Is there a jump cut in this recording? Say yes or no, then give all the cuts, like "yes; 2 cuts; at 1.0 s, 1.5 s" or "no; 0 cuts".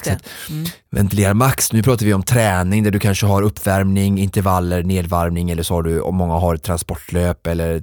no; 0 cuts